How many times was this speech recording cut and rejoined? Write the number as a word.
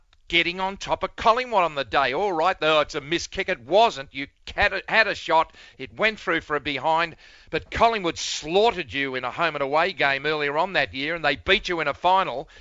zero